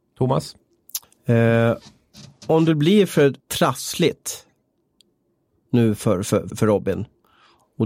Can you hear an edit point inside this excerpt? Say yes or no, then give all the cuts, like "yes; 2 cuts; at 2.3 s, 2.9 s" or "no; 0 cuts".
yes; 3 cuts; at 1.0 s, 3.4 s, 6.5 s